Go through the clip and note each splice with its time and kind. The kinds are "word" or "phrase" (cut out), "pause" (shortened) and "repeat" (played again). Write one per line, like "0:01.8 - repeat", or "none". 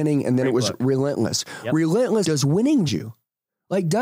0:02.2 - word
0:02.9 - word